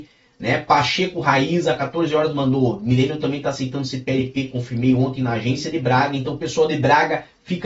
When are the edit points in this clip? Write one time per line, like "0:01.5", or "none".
none